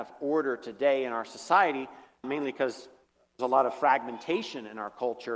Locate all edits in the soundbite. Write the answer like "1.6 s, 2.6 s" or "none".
2.2 s, 3.4 s